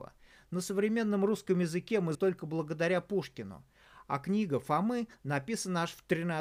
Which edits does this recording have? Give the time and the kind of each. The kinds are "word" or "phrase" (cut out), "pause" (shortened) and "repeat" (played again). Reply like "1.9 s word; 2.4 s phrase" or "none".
2.1 s word